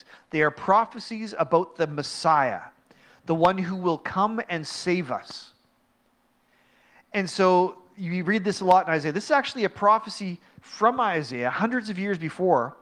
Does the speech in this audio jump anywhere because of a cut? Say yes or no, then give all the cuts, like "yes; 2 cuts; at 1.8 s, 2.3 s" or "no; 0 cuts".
no; 0 cuts